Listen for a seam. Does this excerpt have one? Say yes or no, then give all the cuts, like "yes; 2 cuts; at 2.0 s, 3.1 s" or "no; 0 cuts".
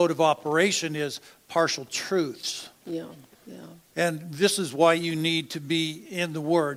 no; 0 cuts